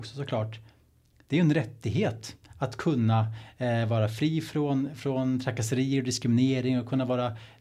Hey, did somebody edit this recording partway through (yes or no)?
no